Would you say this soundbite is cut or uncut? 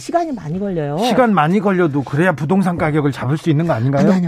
uncut